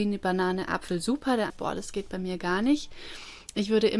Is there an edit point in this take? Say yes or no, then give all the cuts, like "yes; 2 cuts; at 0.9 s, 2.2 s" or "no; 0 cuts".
yes; 1 cut; at 1.5 s